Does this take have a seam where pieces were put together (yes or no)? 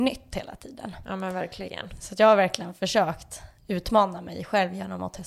no